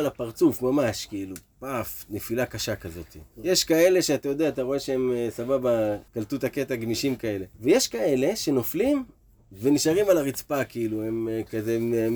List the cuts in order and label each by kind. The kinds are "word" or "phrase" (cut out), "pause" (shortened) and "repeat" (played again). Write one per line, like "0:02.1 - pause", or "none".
0:03.3 - pause
0:06.1 - pause
0:07.5 - pause